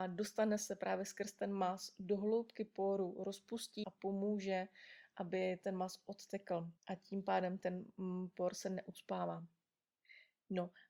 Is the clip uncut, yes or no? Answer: no